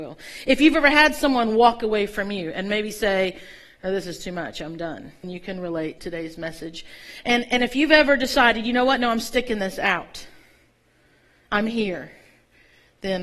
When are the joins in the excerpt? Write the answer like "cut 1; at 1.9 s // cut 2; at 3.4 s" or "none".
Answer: cut 1; at 5.2 s // cut 2; at 6.0 s